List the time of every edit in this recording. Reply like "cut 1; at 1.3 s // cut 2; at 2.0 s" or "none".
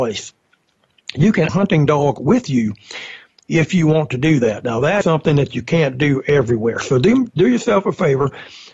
cut 1; at 1.5 s // cut 2; at 5.0 s